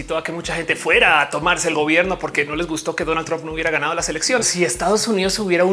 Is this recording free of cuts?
no; 1 cut; at 4.4 s

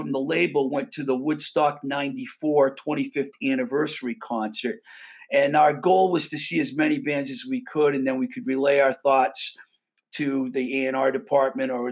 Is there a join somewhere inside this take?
no; 0 cuts

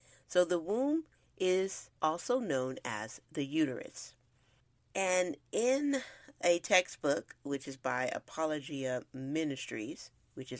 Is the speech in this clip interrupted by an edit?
yes; 1 cut; at 2.0 s

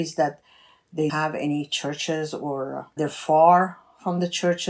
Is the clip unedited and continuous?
no; 2 cuts; at 1.1 s, 3.0 s

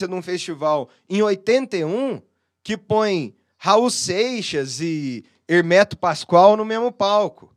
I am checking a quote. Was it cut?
no; 0 cuts

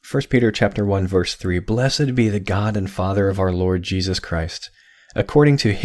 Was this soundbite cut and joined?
no; 0 cuts

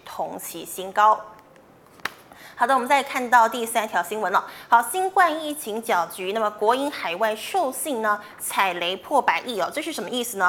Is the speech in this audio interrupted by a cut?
no; 0 cuts

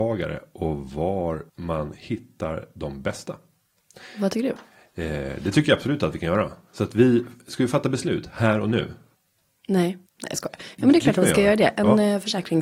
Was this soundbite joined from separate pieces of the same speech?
yes; 3 cuts; at 1.5 s, 9.1 s, 10.1 s

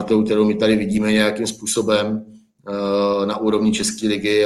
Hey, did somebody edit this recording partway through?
no; 0 cuts

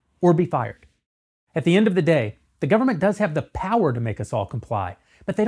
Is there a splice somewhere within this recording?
no; 0 cuts

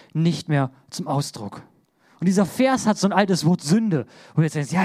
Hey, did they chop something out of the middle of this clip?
no; 0 cuts

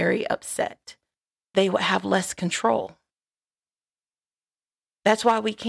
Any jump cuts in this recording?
yes; 1 cut; at 1.5 s

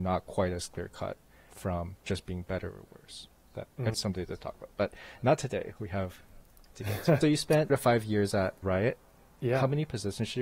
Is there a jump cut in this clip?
yes; 6 cuts; at 1.5 s, 3.9 s, 6.7 s, 7.2 s, 7.7 s, 8.6 s

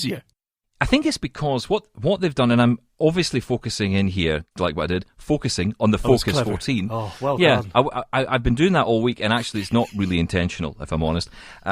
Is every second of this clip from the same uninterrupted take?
no; 1 cut; at 4.5 s

